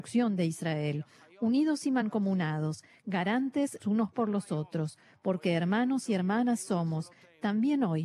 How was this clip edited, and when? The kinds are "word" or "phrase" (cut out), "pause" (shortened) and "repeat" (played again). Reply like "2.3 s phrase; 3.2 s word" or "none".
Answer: 3.8 s word